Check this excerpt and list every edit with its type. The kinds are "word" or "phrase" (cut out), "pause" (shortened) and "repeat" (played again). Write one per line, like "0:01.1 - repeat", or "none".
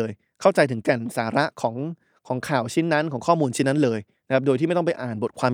none